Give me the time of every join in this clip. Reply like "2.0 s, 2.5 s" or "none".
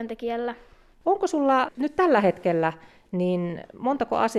none